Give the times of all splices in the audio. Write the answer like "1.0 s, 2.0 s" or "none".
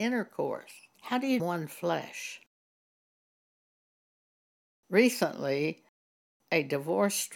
0.9 s, 1.4 s

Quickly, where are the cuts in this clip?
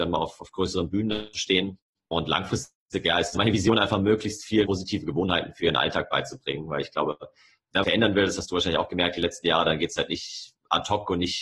1.3 s, 3.3 s, 4.7 s, 7.8 s

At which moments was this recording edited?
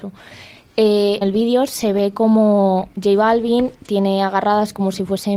1.2 s

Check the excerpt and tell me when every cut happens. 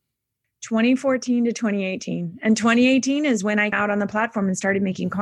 3.7 s

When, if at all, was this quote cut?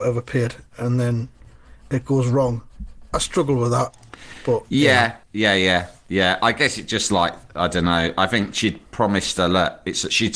5.2 s

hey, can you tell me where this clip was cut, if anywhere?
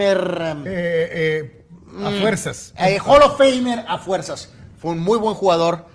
none

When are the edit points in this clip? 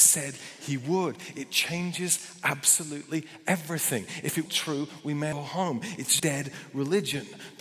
4.5 s, 5.3 s, 6.2 s

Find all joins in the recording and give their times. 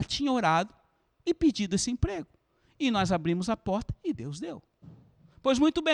none

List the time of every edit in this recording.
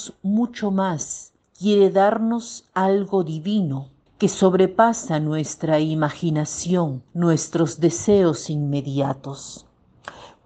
1.4 s, 4.1 s, 7.1 s

